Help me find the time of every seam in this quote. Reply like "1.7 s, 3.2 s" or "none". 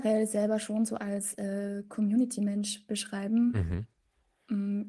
none